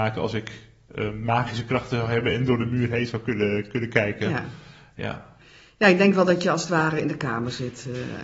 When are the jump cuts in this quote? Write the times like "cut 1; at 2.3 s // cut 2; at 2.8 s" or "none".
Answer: none